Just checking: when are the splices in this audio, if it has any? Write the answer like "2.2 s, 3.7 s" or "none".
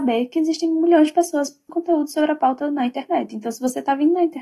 1.7 s